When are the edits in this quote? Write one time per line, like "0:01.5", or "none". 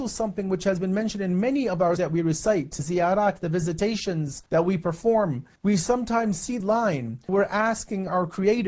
0:02.0
0:02.8
0:04.5
0:05.6
0:06.6
0:07.3